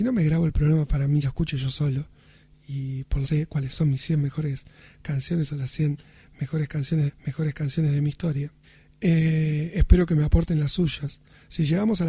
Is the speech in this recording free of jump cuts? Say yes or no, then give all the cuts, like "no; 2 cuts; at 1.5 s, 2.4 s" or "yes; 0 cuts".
no; 4 cuts; at 1.2 s, 3.2 s, 7.1 s, 8.6 s